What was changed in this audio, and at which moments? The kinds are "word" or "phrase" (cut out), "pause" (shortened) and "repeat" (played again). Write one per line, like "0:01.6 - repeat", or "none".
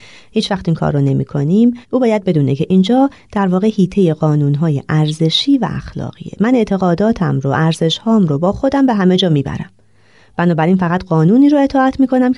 0:01.8 - pause